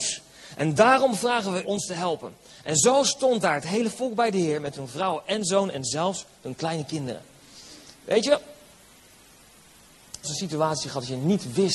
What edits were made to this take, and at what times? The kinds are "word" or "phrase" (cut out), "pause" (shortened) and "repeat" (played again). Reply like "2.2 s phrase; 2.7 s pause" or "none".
1.6 s phrase; 10.2 s phrase